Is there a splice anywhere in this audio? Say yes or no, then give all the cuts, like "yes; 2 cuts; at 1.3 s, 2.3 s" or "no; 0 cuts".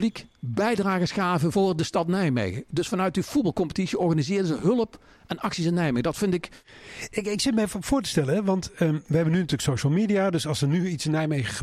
no; 0 cuts